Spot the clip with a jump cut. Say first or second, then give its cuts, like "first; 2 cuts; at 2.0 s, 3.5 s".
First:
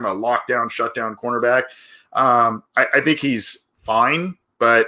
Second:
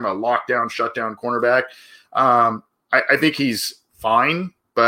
first; 1 cut; at 2.7 s